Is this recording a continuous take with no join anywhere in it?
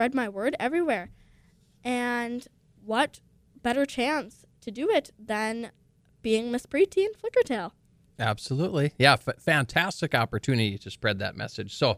yes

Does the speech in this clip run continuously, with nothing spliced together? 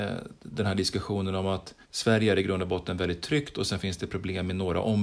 no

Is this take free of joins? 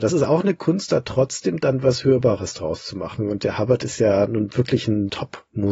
yes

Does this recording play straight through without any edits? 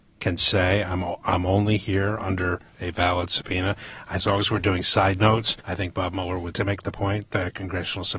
no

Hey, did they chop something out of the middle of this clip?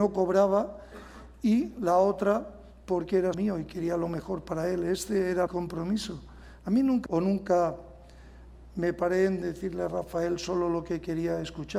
yes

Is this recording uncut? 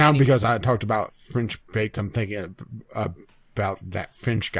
no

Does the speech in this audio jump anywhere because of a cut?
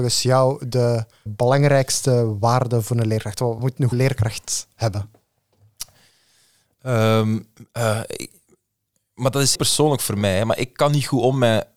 yes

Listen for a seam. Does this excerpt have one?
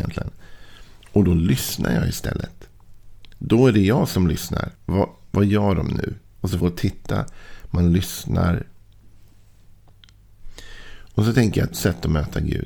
yes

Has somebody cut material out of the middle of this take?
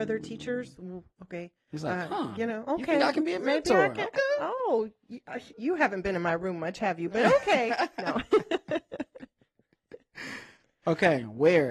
yes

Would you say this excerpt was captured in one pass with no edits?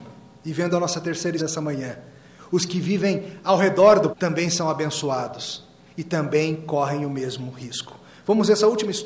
no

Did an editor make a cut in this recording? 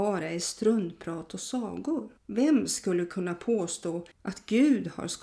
yes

